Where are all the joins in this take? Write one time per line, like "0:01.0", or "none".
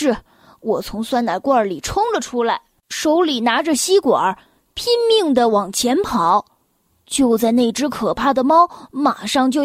none